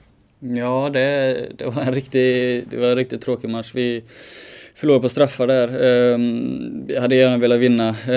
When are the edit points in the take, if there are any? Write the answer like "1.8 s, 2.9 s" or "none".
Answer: none